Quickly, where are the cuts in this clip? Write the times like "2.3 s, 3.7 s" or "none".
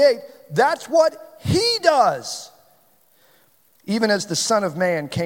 none